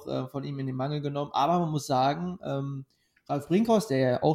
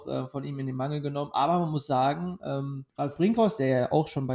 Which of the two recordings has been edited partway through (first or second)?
second